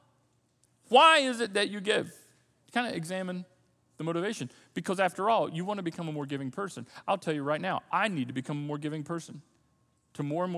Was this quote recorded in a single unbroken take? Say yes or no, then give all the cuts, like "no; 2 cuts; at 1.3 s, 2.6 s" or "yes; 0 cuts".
yes; 0 cuts